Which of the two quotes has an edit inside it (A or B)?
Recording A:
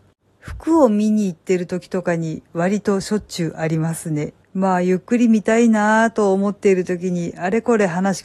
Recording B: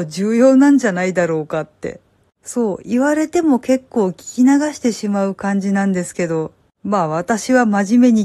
A